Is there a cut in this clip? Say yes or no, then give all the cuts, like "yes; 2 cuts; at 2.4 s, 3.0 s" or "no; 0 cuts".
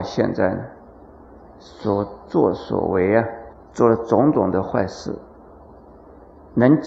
no; 0 cuts